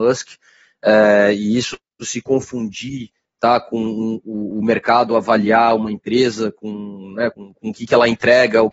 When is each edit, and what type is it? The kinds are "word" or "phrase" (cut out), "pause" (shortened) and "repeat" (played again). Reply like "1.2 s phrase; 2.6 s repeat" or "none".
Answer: 7.3 s word